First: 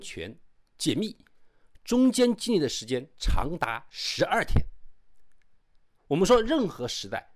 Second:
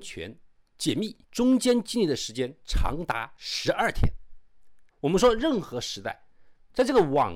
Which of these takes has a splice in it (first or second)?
second